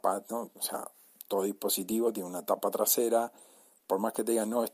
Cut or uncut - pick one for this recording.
uncut